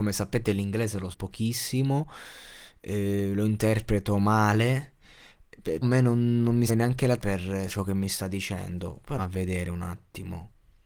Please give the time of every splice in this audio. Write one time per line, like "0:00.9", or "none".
0:01.1
0:05.8
0:06.7
0:07.2
0:07.7
0:09.2